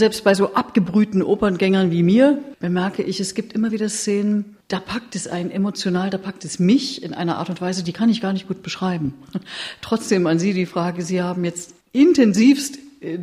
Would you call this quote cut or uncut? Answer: cut